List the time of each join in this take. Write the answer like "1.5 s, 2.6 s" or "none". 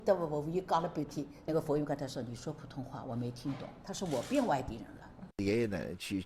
3.8 s